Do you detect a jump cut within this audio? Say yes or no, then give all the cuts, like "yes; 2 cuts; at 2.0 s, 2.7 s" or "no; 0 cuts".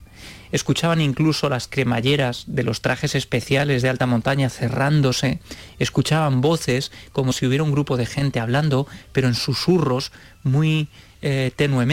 no; 0 cuts